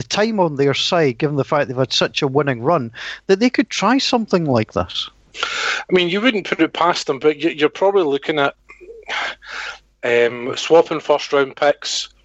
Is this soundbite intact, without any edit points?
no; 1 cut; at 5.3 s

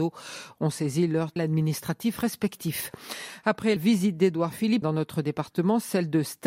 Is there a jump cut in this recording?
yes; 3 cuts; at 1.4 s, 3.8 s, 4.8 s

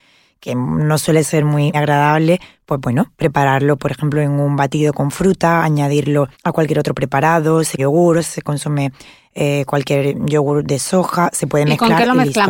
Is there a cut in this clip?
yes; 3 cuts; at 1.7 s, 6.3 s, 7.8 s

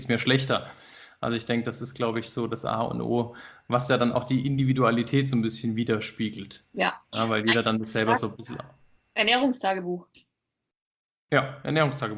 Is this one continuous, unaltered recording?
yes; 0 cuts

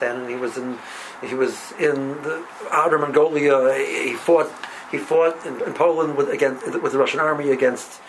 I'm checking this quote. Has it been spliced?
no; 0 cuts

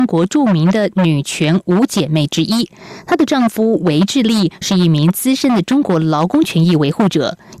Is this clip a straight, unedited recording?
yes; 0 cuts

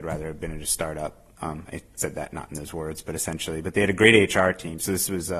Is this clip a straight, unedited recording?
yes; 0 cuts

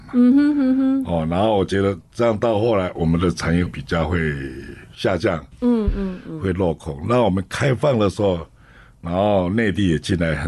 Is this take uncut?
no; 1 cut; at 2.1 s

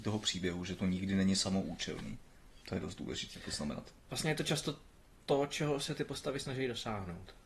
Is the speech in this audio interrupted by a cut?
yes; 1 cut; at 2.6 s

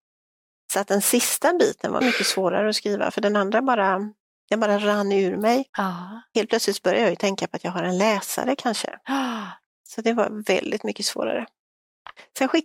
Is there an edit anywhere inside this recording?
yes; 3 cuts; at 2.0 s, 5.7 s, 9.7 s

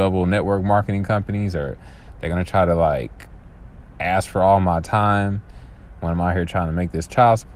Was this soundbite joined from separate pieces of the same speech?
no; 0 cuts

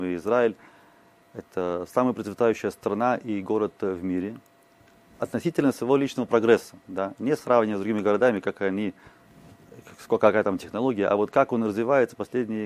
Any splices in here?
yes; 1 cut; at 6.8 s

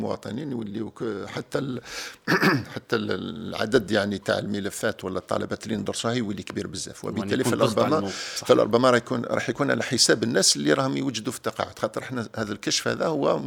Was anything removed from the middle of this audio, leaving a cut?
no; 0 cuts

